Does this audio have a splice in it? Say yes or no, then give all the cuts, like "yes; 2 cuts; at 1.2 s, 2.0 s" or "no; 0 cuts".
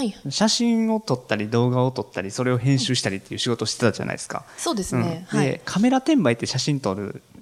no; 0 cuts